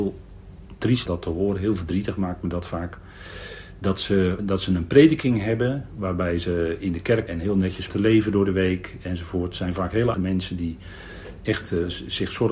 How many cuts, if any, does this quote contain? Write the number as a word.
five